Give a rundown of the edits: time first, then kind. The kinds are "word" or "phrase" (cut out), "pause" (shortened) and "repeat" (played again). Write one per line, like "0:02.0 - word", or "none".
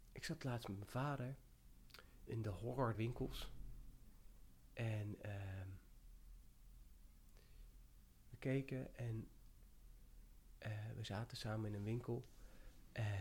0:02.3 - word
0:02.9 - word
0:08.2 - word